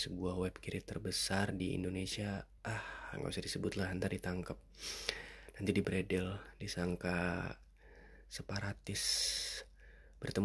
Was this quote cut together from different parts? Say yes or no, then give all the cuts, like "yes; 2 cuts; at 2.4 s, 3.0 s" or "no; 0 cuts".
no; 0 cuts